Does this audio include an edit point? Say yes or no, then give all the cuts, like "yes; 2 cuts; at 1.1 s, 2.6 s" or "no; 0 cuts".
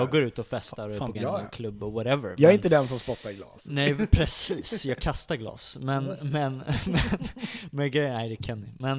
yes; 1 cut; at 1.1 s